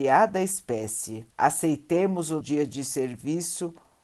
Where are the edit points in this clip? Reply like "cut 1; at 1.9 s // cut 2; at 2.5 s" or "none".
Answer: cut 1; at 1.3 s // cut 2; at 2.4 s